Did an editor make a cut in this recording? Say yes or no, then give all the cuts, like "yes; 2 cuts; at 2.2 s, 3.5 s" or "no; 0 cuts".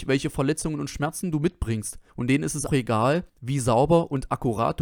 yes; 3 cuts; at 2.1 s, 2.7 s, 3.3 s